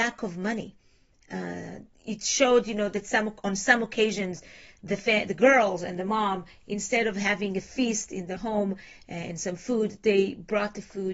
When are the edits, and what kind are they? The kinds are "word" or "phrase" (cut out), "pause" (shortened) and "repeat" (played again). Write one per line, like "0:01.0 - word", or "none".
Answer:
0:08.4 - word